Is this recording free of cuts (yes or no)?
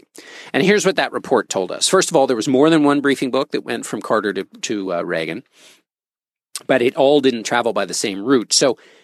yes